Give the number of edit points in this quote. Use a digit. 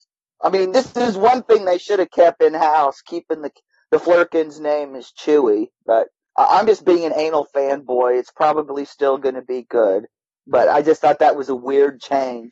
0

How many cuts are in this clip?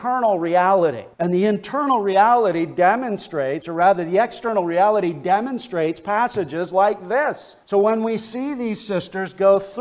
2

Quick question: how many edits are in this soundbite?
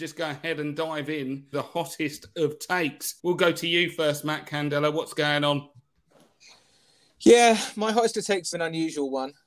3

